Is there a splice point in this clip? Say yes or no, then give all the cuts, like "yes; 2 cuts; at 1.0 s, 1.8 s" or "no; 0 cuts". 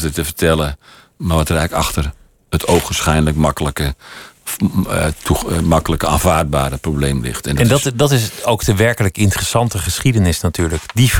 no; 0 cuts